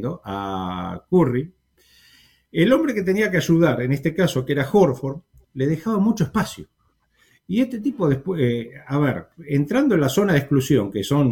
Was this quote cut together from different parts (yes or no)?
no